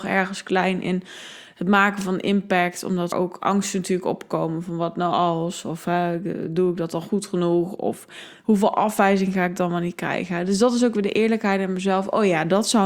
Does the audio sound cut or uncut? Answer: cut